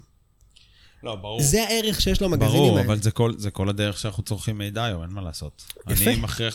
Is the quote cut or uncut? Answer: uncut